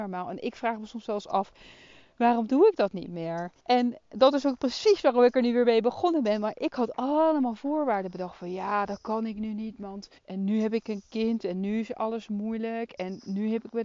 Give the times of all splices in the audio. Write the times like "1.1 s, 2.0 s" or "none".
3.6 s, 10.2 s